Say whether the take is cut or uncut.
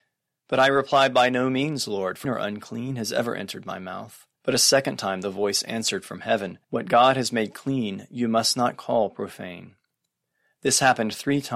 cut